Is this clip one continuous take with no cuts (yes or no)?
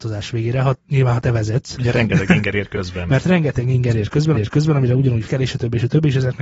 no